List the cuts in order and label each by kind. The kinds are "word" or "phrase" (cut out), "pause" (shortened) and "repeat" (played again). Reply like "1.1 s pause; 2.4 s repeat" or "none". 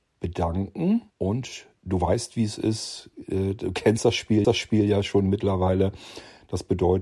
1.1 s pause; 4.4 s repeat